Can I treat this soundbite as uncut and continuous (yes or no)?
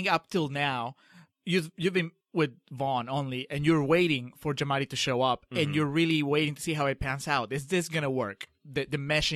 no